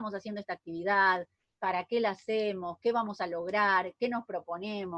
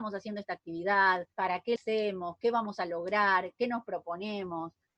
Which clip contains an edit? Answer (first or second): second